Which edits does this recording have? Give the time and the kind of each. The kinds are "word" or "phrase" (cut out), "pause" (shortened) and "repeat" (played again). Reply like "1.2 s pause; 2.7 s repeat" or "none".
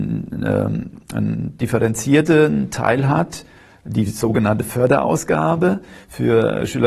none